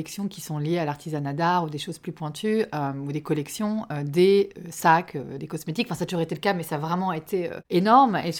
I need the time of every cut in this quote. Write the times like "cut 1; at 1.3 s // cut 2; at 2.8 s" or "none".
none